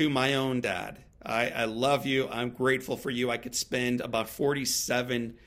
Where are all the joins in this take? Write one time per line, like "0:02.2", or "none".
none